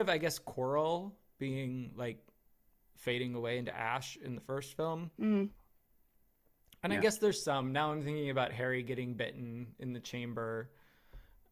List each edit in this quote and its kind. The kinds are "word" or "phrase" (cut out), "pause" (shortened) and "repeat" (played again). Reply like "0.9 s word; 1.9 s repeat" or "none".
none